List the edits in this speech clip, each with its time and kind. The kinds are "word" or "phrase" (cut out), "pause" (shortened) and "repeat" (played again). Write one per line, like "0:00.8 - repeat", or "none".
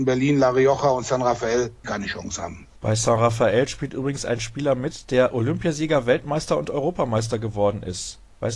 0:01.8 - word
0:02.8 - pause